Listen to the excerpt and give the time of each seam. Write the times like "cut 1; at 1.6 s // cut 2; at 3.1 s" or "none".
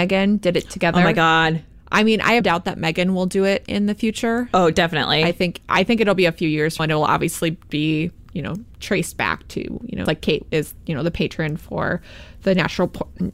cut 1; at 1.7 s // cut 2; at 2.4 s // cut 3; at 6.8 s // cut 4; at 8.3 s // cut 5; at 10.1 s